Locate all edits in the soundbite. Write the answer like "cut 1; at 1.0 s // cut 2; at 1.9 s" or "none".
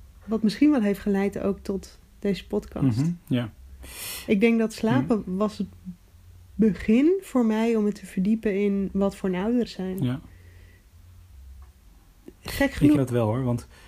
cut 1; at 2.1 s // cut 2; at 9.7 s // cut 3; at 13.0 s